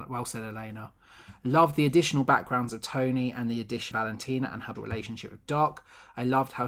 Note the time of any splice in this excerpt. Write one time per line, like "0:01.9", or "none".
0:03.9
0:04.8